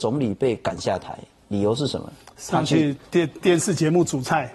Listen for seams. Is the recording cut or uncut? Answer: uncut